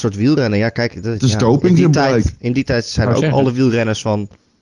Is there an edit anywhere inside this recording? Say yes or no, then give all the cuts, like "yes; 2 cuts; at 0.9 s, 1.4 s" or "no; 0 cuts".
no; 0 cuts